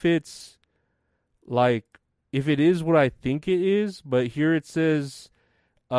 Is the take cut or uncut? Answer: uncut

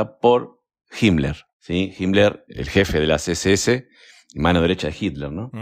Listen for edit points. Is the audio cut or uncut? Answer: uncut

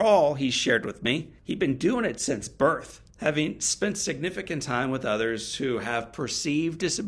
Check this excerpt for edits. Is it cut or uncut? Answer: cut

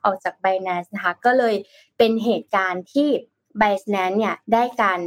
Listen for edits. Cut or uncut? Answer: uncut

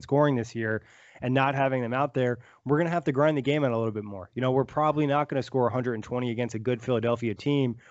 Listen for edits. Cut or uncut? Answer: uncut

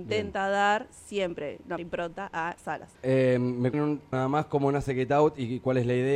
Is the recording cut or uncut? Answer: cut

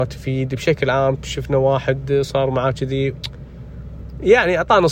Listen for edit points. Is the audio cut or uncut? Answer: cut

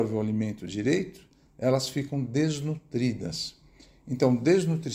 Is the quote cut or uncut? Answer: uncut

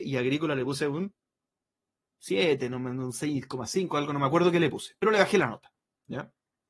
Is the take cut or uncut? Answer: uncut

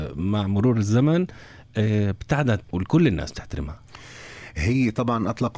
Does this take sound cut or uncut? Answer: cut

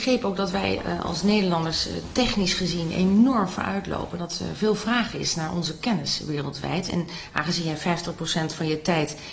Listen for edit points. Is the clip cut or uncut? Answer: uncut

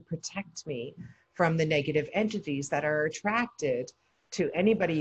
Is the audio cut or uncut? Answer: uncut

